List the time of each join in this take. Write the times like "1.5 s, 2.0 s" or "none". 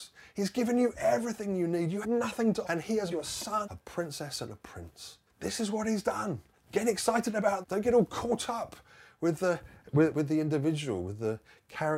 2.0 s, 2.6 s, 3.1 s, 3.6 s, 5.3 s, 6.5 s, 7.6 s, 10.1 s